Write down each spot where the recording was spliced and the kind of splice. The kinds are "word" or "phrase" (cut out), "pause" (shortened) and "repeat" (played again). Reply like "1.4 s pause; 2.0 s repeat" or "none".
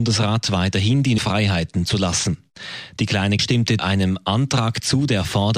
1.2 s word; 3.4 s word; 3.8 s word